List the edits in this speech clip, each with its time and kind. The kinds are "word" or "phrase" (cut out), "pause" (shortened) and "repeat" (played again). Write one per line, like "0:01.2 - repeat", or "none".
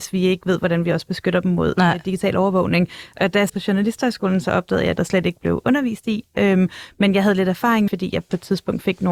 0:03.5 - word
0:05.0 - phrase
0:07.9 - phrase